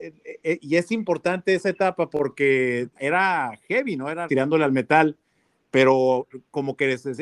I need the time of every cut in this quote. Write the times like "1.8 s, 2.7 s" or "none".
3.0 s, 4.3 s

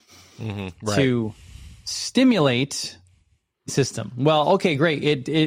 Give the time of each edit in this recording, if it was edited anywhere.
3.7 s

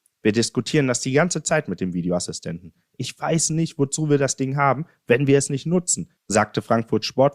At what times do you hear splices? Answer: none

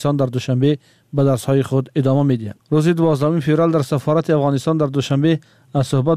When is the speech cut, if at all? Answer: none

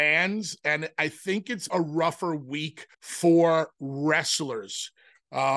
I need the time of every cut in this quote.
1.7 s, 2.9 s

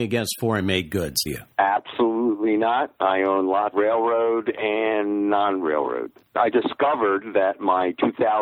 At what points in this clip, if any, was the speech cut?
1.3 s, 3.7 s, 6.5 s

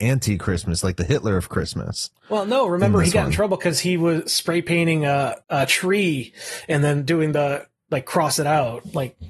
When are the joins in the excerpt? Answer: 5.4 s

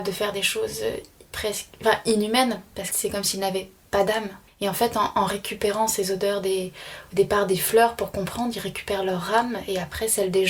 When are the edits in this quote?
2.9 s, 4.5 s

